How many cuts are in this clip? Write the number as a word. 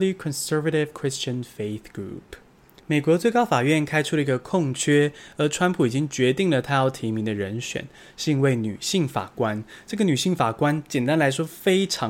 zero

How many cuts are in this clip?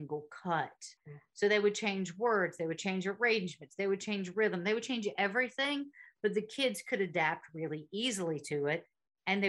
one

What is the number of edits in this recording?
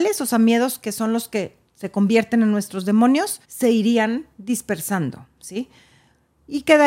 one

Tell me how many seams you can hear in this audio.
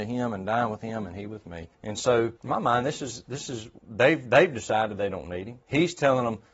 four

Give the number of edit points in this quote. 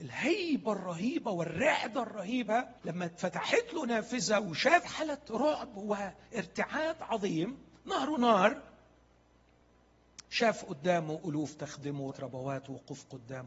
five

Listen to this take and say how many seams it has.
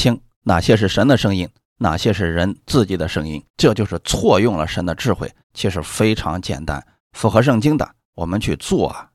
two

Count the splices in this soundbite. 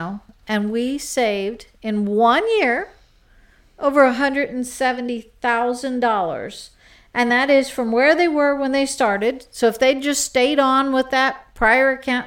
zero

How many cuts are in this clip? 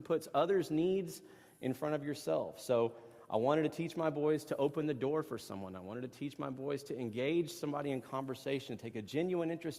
zero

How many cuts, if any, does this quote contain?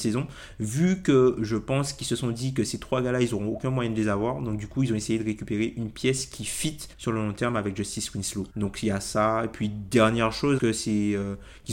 four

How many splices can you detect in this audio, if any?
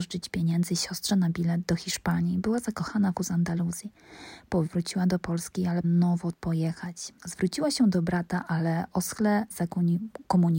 six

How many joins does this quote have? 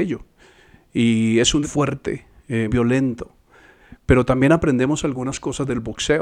two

